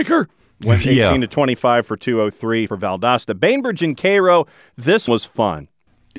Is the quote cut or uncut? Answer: cut